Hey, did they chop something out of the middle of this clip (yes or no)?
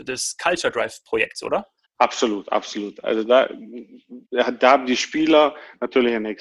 yes